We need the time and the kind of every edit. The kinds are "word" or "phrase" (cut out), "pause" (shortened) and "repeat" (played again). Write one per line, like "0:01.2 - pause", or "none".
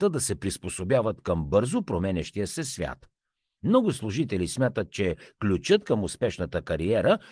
none